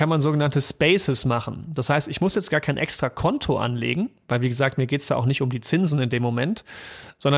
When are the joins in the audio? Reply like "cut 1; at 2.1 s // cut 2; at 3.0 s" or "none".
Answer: none